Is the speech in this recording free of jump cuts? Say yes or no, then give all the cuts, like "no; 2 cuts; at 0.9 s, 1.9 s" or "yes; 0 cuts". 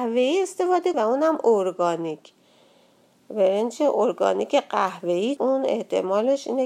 no; 2 cuts; at 0.9 s, 5.4 s